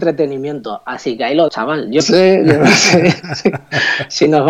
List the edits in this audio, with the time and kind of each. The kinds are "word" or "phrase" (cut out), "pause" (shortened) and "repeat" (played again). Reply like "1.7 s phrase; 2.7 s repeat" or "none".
1.5 s word; 2.0 s word

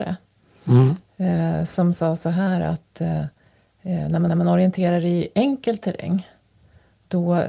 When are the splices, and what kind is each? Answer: 4.3 s repeat

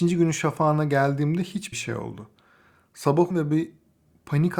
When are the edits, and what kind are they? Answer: 1.7 s word; 3.3 s word

